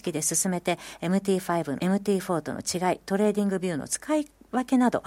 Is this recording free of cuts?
no; 1 cut; at 1.8 s

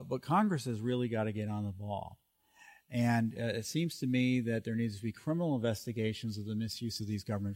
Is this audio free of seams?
yes; 0 cuts

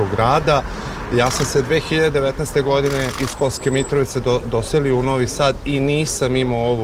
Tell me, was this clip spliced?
no; 0 cuts

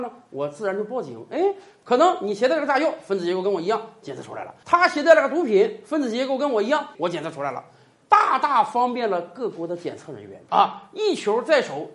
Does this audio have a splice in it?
yes; 1 cut; at 6.9 s

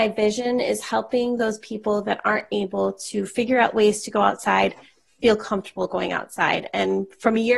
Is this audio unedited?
yes; 0 cuts

